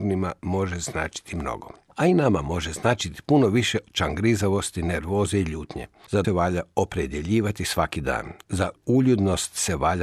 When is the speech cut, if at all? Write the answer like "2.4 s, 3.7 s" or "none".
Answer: 1.9 s, 3.9 s, 6.2 s